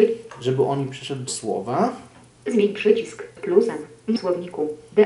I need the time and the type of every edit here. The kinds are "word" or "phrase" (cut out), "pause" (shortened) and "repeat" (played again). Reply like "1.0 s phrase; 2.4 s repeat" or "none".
1.3 s word; 3.4 s word; 4.2 s word